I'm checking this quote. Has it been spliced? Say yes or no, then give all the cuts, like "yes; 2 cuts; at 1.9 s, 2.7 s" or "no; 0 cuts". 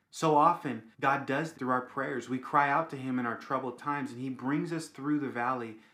yes; 2 cuts; at 0.9 s, 1.5 s